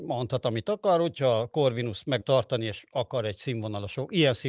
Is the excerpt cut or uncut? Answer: cut